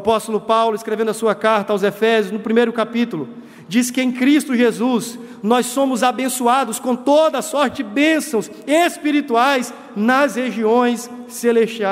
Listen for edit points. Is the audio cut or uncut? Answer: uncut